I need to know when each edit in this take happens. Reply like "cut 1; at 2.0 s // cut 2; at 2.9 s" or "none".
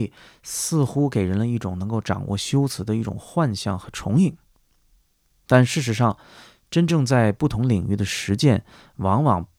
none